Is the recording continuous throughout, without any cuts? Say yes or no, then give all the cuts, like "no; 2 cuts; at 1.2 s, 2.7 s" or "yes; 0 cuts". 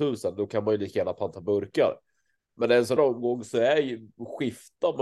no; 1 cut; at 3.0 s